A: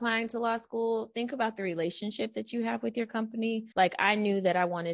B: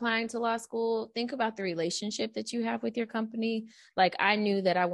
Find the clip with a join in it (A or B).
A